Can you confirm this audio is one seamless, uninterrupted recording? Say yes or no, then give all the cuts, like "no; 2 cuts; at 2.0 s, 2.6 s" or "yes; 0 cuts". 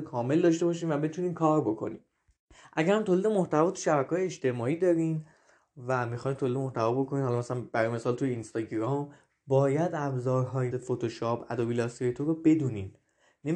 no; 1 cut; at 10.7 s